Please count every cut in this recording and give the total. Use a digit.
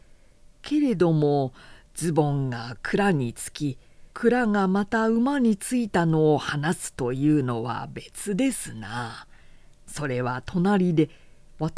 1